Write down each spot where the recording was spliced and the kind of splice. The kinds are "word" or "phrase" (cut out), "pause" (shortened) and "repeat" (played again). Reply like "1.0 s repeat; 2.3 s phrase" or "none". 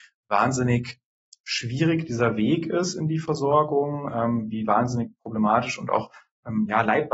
none